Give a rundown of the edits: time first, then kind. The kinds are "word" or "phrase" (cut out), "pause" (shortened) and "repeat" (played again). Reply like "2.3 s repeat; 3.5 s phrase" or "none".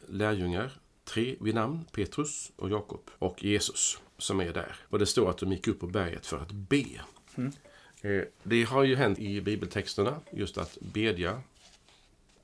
2.6 s word; 3.2 s pause; 4.1 s pause; 4.9 s pause; 8.3 s pause; 9.2 s word